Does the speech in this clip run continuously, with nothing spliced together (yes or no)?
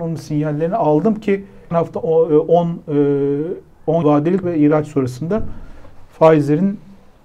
no